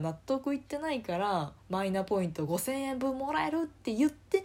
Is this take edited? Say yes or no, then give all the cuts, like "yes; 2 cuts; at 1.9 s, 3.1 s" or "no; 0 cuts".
yes; 1 cut; at 1.6 s